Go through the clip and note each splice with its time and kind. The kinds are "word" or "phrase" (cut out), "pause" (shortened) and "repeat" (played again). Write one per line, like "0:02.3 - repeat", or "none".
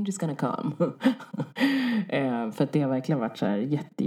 none

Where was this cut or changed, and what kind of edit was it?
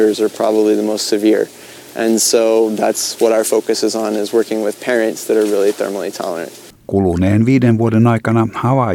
0:06.8 - pause

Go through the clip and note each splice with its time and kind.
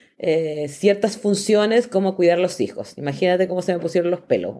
none

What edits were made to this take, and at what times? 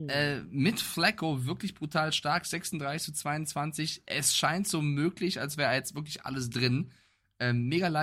none

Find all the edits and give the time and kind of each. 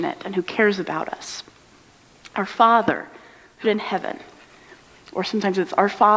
0:03.6 - word

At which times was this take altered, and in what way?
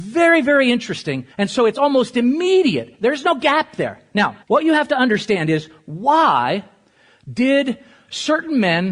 0:01.3 - pause
0:04.4 - pause

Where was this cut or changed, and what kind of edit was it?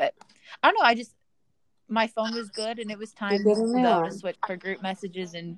0:04.3 - word

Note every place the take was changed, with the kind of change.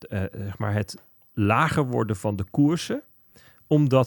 none

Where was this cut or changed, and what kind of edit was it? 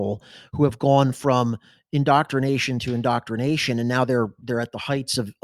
none

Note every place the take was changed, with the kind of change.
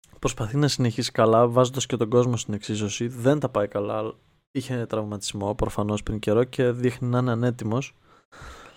none

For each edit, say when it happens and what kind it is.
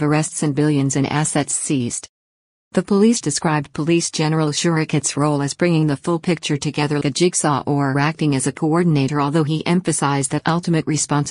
0:03.2 - word
0:07.0 - word

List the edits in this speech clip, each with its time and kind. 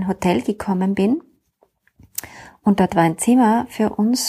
none

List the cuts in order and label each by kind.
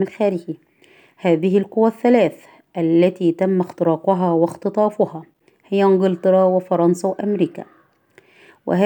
none

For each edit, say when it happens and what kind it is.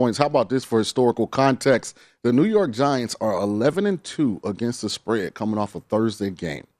none

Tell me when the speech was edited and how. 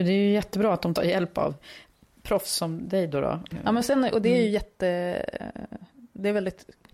0:01.0 - phrase

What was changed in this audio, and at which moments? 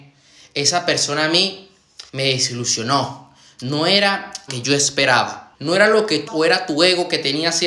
0:02.1 - pause
0:04.5 - word
0:05.5 - pause
0:06.3 - word

